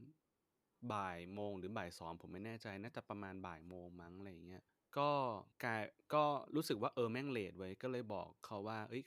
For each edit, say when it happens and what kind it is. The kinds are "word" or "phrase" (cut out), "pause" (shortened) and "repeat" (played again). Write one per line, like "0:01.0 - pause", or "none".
0:04.7 - pause
0:05.5 - pause

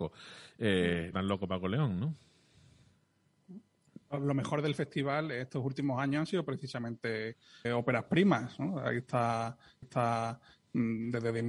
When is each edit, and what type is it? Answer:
0:01.1 - phrase
0:07.6 - word
0:09.8 - repeat

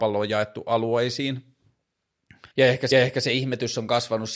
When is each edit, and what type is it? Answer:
0:02.5 - pause
0:02.9 - repeat

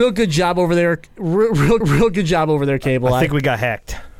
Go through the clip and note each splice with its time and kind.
0:01.8 - repeat

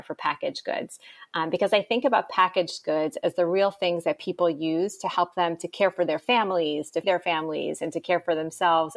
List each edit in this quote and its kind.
0:07.0 - word

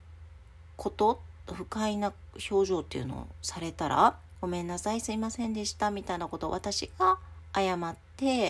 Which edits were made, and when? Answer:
0:04.3 - word

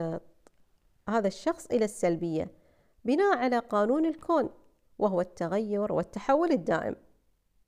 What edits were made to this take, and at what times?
none

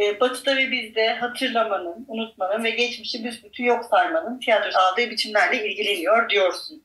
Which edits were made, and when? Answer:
0:04.7 - word

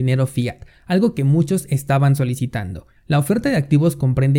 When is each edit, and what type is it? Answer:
0:03.0 - pause

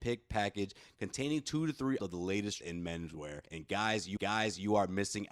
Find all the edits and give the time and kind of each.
0:02.0 - word
0:02.6 - word
0:03.5 - pause
0:04.2 - repeat

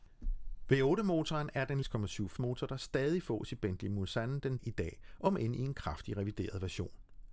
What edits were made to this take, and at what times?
0:01.8 - word
0:02.4 - word
0:04.6 - word

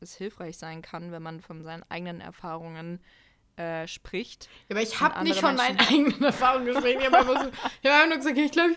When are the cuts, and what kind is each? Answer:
none

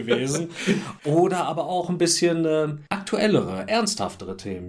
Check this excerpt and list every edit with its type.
0:02.9 - pause

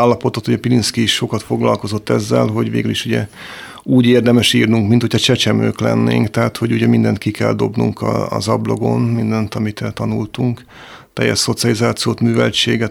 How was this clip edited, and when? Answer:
none

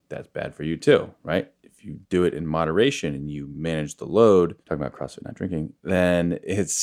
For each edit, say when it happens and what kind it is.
0:01.5 - pause
0:02.0 - pause
0:04.6 - pause

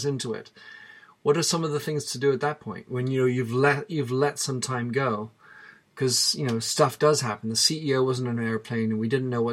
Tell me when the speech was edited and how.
none

